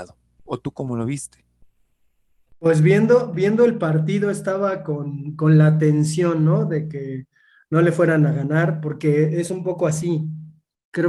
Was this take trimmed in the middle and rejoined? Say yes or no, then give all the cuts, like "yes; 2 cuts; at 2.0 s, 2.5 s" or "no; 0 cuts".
yes; 1 cut; at 2.5 s